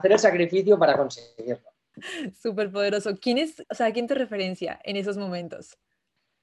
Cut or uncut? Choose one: cut